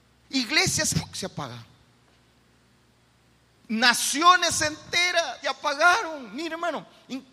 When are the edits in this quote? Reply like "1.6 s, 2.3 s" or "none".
0.9 s, 5.4 s